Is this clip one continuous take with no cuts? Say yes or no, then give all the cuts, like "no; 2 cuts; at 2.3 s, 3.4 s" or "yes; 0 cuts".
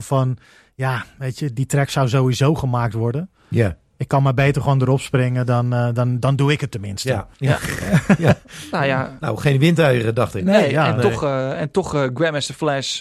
no; 1 cut; at 7.3 s